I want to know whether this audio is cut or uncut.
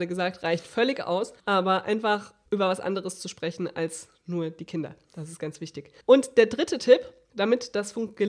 cut